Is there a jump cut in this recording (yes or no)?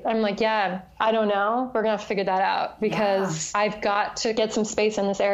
no